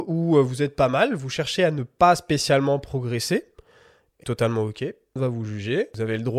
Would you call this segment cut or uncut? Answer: cut